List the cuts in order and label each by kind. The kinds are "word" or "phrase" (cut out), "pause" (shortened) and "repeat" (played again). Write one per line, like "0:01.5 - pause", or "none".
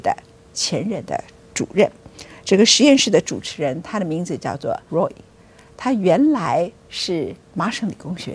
0:04.9 - word